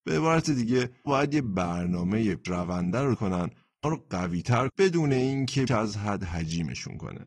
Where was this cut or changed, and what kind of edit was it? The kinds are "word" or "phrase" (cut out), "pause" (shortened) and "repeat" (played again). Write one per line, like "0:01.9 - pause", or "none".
0:01.1 - word
0:02.5 - word
0:03.2 - word
0:03.8 - word
0:04.7 - word
0:05.7 - word